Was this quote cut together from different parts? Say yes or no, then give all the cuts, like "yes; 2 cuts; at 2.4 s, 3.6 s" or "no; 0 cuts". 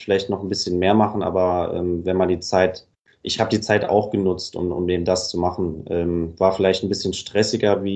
no; 0 cuts